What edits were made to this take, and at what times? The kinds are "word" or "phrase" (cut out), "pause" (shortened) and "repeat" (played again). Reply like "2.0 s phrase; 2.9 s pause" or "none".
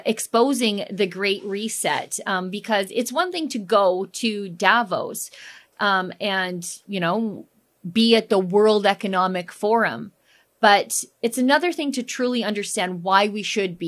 none